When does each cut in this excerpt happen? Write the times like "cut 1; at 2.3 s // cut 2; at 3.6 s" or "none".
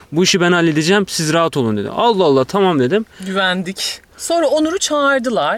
none